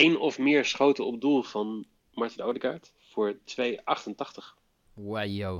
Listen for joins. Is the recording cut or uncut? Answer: uncut